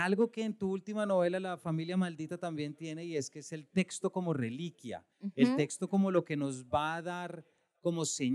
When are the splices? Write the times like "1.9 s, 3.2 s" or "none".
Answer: 5.1 s